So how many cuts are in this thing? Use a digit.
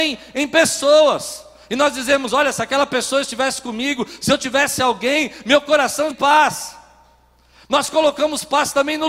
1